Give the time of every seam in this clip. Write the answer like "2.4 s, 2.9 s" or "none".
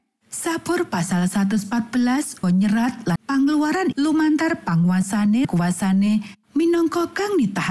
2.4 s, 3.2 s, 3.9 s, 5.4 s, 6.4 s